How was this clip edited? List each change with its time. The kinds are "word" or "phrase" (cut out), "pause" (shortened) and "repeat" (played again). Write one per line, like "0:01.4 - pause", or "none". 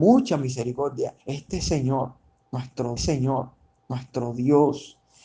0:01.2 - pause
0:03.0 - repeat